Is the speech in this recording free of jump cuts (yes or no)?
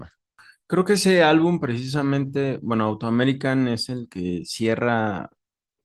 yes